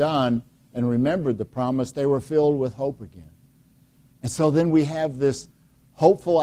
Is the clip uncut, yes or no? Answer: yes